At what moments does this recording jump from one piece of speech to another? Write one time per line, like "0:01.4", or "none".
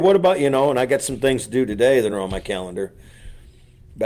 none